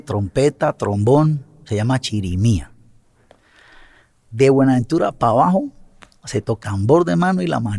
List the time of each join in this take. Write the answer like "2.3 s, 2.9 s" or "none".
6.6 s